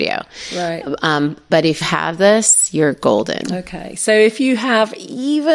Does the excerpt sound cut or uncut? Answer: cut